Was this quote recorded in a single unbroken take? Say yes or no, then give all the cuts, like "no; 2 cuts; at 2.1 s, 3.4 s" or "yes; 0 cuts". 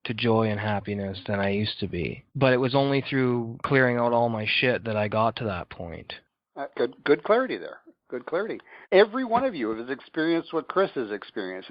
no; 3 cuts; at 2.3 s, 6.7 s, 8.8 s